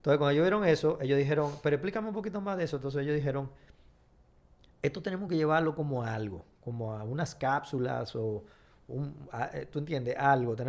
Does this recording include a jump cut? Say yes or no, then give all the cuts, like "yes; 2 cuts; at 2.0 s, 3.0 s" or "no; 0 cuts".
no; 0 cuts